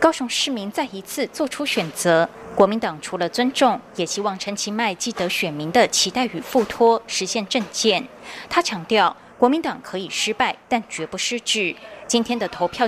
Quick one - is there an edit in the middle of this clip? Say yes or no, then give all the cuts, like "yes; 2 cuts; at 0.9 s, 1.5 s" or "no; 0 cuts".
no; 0 cuts